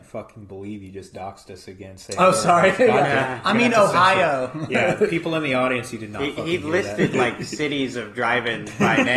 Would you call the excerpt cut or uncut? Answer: uncut